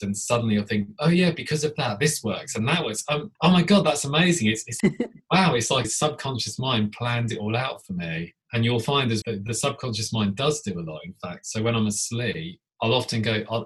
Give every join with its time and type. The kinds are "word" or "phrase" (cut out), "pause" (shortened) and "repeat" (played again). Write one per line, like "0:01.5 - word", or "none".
0:03.4 - pause
0:04.8 - word
0:05.8 - phrase
0:08.4 - pause
0:09.2 - word
0:12.7 - pause

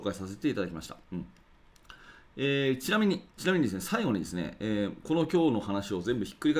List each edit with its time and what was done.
0:01.0 - pause
0:03.3 - pause

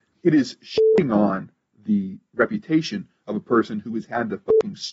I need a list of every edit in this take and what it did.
none

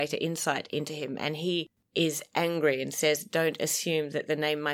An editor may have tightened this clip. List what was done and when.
none

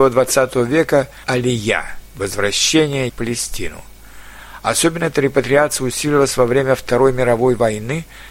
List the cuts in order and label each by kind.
0:01.2 - word
0:03.1 - word

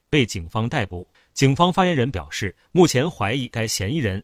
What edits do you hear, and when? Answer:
0:01.1 - pause

